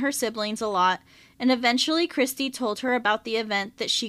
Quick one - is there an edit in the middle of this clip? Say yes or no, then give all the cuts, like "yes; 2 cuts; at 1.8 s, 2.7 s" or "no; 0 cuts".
no; 0 cuts